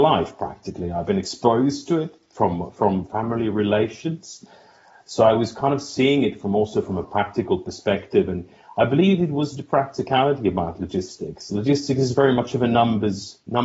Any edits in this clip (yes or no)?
no